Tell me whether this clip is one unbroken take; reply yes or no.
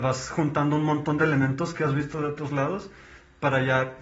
yes